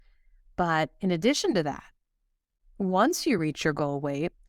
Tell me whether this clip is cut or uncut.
uncut